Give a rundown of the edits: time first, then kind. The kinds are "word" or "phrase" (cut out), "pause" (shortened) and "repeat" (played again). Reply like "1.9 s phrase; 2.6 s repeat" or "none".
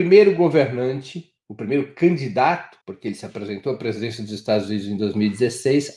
2.8 s pause